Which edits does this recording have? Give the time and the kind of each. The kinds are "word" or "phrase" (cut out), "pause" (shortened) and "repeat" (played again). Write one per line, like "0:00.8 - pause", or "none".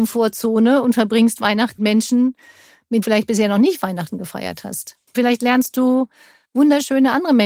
0:01.8 - word
0:03.0 - phrase
0:05.1 - pause